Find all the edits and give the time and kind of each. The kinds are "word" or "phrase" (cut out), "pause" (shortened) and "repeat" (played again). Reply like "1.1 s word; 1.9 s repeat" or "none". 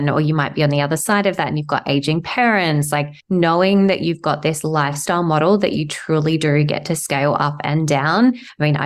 3.2 s pause